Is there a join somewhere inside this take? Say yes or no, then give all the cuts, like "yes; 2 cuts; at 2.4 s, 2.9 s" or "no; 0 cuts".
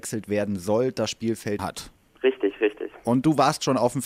yes; 1 cut; at 1.6 s